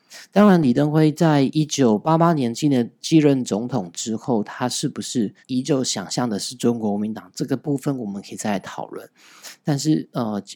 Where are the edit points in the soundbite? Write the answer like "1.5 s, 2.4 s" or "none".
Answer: 5.4 s